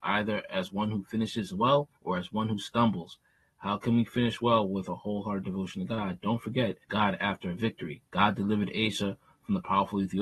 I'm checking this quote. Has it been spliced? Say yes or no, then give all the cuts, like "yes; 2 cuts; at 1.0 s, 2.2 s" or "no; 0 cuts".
yes; 3 cuts; at 2.0 s, 6.8 s, 8.1 s